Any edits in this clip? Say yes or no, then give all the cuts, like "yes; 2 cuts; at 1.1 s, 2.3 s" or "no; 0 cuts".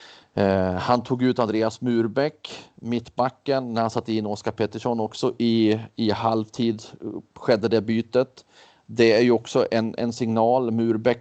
no; 0 cuts